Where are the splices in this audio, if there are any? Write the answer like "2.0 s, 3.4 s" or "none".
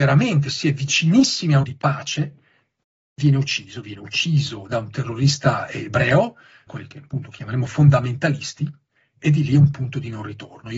1.6 s, 6.7 s